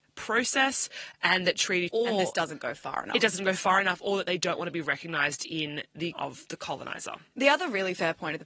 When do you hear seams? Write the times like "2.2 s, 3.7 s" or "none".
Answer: 1.9 s, 6.1 s